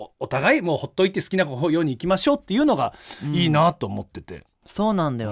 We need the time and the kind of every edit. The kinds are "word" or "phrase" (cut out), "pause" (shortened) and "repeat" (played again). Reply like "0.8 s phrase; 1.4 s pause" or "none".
none

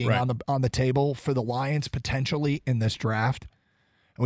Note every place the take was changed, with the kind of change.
none

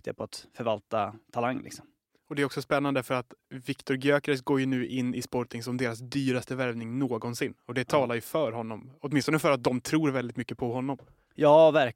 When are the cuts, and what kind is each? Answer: none

